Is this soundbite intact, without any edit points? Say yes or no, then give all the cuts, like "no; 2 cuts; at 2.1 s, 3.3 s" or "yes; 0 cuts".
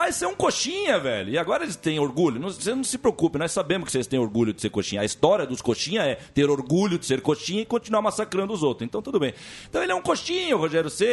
yes; 0 cuts